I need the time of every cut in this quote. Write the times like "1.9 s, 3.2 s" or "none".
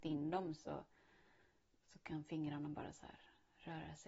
none

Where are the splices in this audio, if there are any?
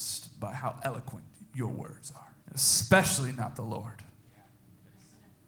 2.4 s

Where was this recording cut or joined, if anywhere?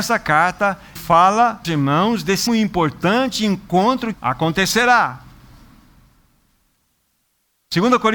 1.0 s, 1.6 s, 2.5 s, 4.1 s

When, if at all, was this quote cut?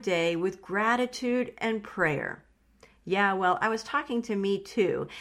none

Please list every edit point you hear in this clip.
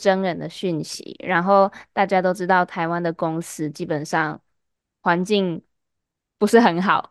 none

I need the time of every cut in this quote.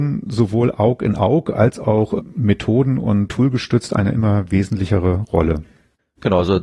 none

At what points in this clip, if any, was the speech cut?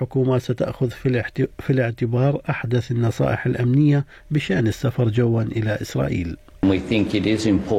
none

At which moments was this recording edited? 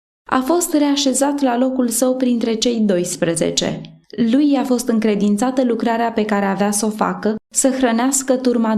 4.0 s, 7.4 s

